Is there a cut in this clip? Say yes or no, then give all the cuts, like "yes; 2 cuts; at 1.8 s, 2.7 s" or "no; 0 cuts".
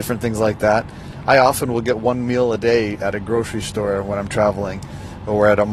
no; 0 cuts